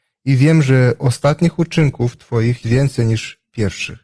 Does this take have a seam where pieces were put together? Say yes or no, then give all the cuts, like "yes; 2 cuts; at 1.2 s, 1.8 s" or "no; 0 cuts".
yes; 1 cut; at 2.6 s